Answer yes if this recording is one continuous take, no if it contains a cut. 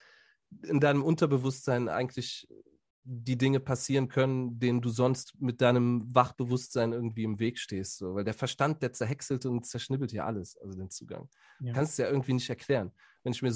yes